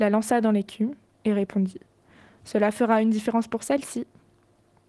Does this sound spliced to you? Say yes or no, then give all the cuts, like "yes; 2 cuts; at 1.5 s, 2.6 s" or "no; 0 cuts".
no; 0 cuts